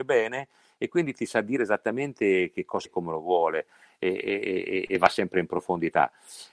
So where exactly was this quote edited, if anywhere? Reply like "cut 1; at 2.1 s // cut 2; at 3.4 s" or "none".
cut 1; at 2.8 s